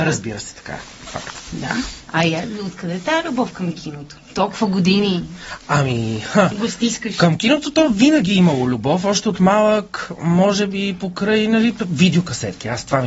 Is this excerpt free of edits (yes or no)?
yes